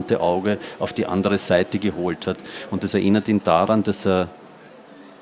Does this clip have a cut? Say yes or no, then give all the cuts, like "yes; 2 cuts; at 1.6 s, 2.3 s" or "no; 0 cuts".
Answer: no; 0 cuts